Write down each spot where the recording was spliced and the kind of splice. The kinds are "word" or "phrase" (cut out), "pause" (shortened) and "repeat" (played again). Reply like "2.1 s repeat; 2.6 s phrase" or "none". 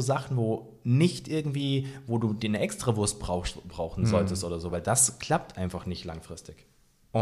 none

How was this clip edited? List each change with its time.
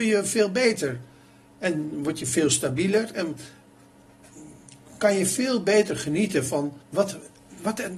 6.8 s pause

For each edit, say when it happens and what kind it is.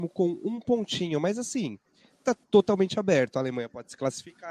2.4 s pause

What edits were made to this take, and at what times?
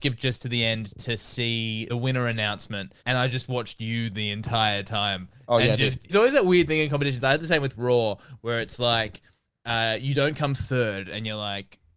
1.9 s phrase; 3.0 s pause; 6.1 s word

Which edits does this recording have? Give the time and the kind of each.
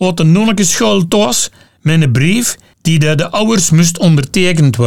none

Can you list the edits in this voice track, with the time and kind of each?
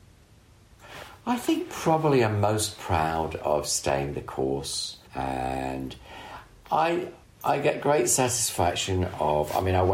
5.1 s pause; 7.2 s pause

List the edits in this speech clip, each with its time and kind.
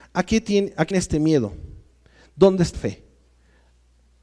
0.9 s word; 2.7 s word

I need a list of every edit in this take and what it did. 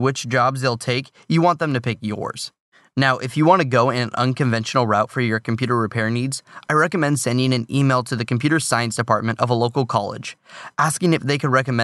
none

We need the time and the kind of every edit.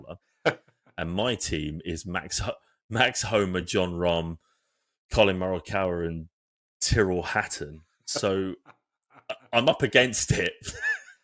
none

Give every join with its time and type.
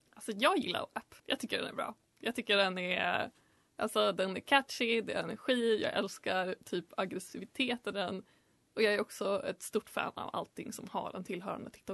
1.2 s pause; 7.9 s word

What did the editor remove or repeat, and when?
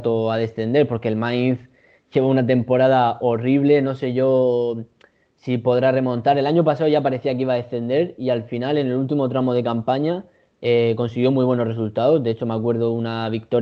none

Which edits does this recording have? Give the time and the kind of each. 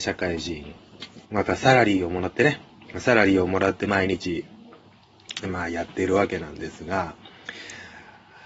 1.2 s pause

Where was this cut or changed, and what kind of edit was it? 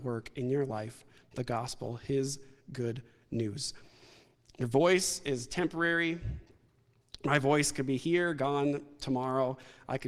none

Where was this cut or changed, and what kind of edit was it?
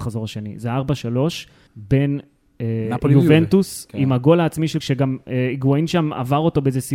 1.7 s pause; 3.9 s word; 4.8 s word

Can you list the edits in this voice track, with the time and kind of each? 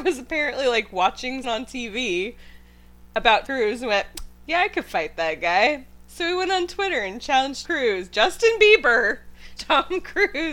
1.4 s word; 3.5 s word; 7.6 s word; 9.6 s word

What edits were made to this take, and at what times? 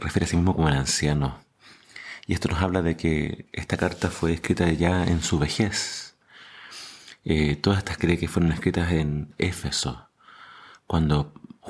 8.0 s phrase

